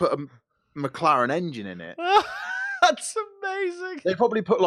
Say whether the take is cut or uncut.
uncut